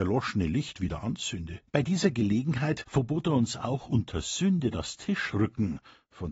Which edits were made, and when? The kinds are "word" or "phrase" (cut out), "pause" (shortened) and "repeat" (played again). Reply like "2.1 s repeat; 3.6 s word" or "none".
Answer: 1.7 s pause